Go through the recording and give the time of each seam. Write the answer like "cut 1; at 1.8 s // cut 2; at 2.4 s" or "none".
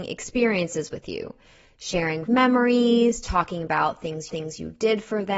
cut 1; at 2.3 s // cut 2; at 4.3 s

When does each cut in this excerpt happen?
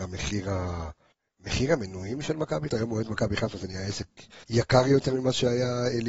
cut 1; at 1.1 s // cut 2; at 2.7 s // cut 3; at 4.4 s

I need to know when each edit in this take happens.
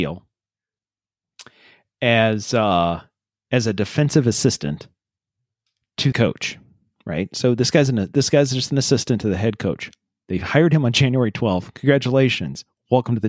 cut 1; at 6.1 s

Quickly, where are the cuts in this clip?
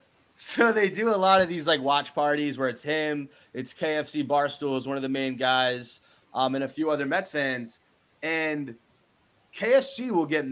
none

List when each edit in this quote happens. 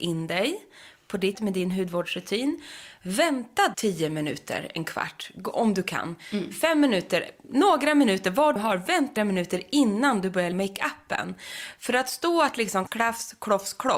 cut 1; at 1.3 s // cut 2; at 3.7 s // cut 3; at 8.6 s // cut 4; at 9.2 s // cut 5; at 10.5 s // cut 6; at 12.9 s

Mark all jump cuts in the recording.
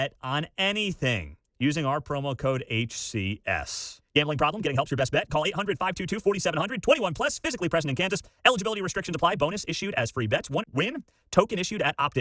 cut 1; at 1.5 s // cut 2; at 10.6 s

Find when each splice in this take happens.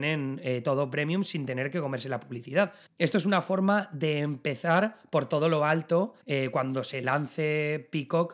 cut 1; at 2.9 s // cut 2; at 6.2 s

